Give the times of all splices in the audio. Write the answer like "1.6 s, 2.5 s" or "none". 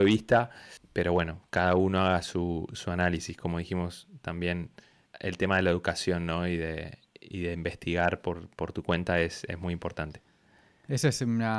none